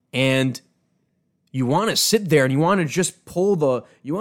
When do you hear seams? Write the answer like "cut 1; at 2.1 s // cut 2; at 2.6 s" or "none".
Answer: none